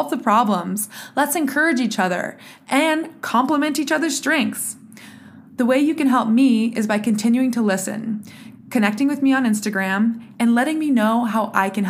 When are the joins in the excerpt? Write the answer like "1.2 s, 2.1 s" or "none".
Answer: none